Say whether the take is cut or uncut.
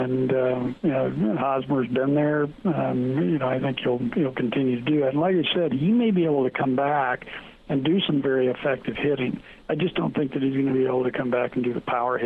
uncut